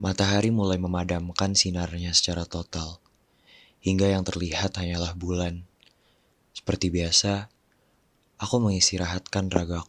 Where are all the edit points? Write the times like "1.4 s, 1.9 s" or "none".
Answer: none